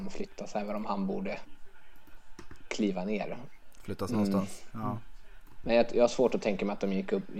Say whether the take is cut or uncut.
uncut